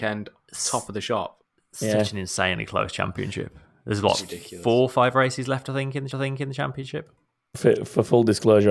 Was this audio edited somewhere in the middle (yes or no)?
yes